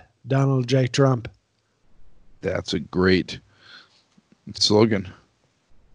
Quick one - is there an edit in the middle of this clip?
yes; 1 cut; at 4.6 s

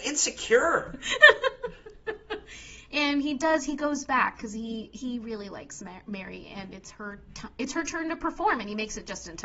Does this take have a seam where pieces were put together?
no; 0 cuts

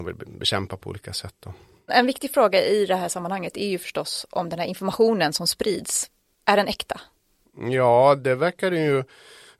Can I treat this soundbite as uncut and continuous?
yes; 0 cuts

